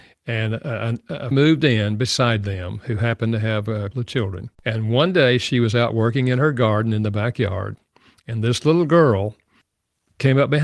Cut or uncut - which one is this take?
cut